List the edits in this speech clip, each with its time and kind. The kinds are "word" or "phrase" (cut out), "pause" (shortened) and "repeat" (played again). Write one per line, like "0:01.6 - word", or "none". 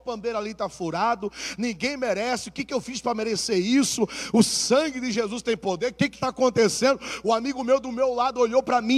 none